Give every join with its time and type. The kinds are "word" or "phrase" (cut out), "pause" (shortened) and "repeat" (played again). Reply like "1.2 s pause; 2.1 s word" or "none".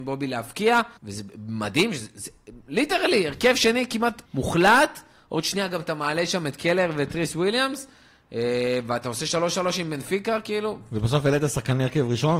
1.0 s pause; 4.3 s pause